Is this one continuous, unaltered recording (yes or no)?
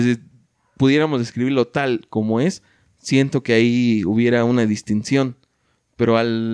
yes